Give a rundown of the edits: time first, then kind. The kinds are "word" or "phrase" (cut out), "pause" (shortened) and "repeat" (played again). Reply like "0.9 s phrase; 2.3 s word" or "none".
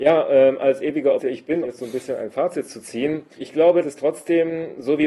1.2 s word; 1.6 s word; 3.4 s word; 3.8 s word